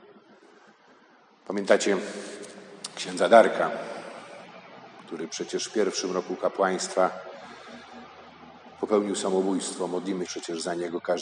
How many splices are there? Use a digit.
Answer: 1